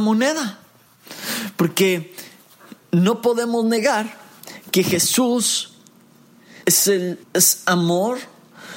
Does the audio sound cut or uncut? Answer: cut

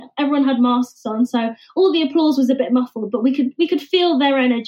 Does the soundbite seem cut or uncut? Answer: uncut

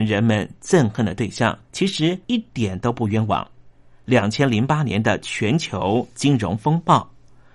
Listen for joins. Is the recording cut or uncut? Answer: cut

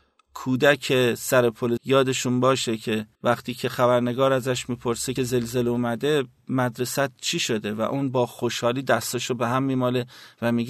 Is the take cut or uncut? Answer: cut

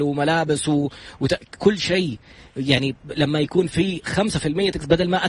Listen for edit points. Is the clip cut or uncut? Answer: uncut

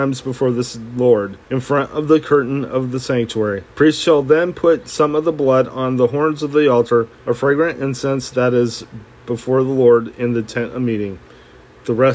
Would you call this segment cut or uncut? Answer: cut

